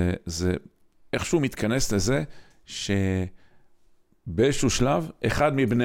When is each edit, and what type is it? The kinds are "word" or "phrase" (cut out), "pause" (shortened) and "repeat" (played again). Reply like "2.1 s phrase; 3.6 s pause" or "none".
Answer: none